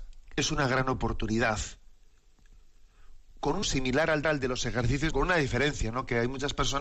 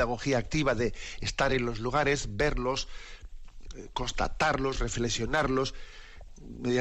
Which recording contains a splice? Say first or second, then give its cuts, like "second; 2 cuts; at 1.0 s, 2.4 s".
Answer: first; 3 cuts; at 3.6 s, 4.2 s, 5.1 s